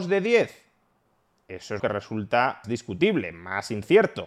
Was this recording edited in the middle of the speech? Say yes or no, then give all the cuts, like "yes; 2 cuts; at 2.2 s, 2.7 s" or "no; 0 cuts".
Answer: yes; 2 cuts; at 1.8 s, 2.6 s